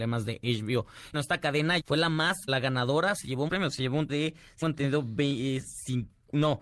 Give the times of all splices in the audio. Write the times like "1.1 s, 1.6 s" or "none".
1.1 s, 1.8 s, 2.5 s, 3.5 s, 4.1 s, 4.6 s